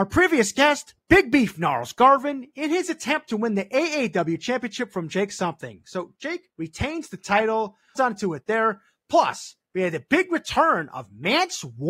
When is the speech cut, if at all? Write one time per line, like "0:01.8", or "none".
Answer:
0:06.5
0:08.0